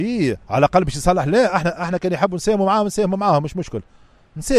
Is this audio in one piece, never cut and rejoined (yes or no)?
yes